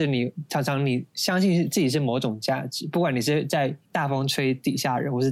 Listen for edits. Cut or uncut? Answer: cut